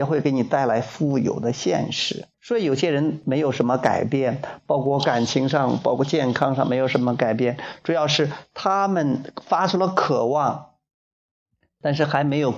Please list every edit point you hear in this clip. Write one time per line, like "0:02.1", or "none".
0:02.3